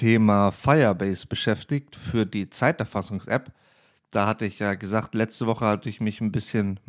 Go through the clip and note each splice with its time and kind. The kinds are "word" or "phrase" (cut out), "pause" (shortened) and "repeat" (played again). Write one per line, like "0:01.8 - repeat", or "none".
none

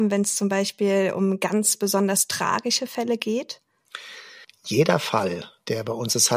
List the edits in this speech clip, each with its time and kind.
0:04.4 - pause

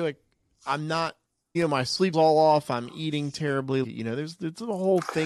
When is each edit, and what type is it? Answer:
0:01.5 - word
0:02.1 - word
0:03.8 - word

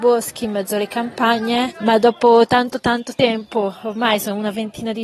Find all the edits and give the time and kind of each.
none

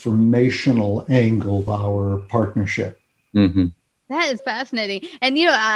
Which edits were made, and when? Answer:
0:01.7 - word
0:04.4 - word

